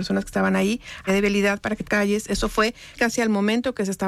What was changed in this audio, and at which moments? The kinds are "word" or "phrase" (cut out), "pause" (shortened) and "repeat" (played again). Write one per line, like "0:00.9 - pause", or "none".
0:01.1 - phrase
0:01.8 - phrase
0:03.0 - word